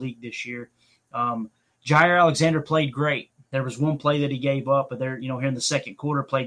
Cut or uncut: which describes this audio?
uncut